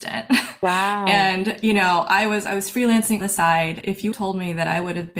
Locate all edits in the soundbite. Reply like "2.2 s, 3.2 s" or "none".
3.2 s, 3.8 s, 4.1 s